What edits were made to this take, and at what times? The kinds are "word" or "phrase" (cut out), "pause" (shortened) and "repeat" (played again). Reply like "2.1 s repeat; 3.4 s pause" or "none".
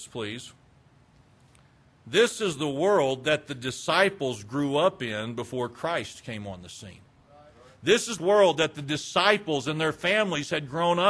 8.2 s phrase